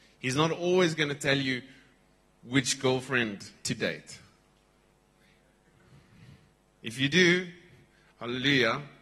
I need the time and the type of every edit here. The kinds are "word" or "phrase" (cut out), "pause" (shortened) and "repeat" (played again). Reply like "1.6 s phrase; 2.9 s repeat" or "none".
none